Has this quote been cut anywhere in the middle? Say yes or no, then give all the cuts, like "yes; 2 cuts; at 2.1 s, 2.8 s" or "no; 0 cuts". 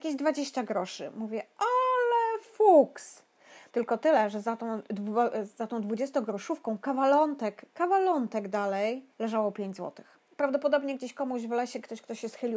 yes; 2 cuts; at 3.7 s, 9.1 s